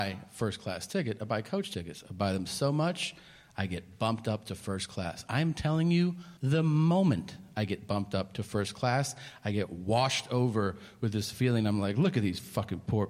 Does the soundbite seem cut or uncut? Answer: cut